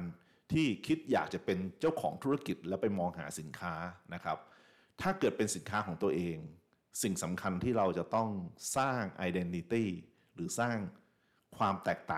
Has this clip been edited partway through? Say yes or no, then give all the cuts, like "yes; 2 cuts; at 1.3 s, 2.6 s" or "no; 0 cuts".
no; 0 cuts